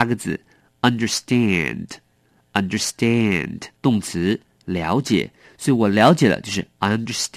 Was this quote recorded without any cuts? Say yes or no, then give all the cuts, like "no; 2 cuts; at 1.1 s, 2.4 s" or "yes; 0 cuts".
no; 1 cut; at 3.8 s